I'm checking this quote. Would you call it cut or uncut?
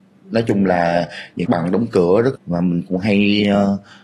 cut